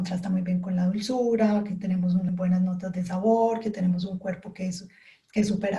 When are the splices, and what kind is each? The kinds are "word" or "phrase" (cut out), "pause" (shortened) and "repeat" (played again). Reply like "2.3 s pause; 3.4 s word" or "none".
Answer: 2.3 s word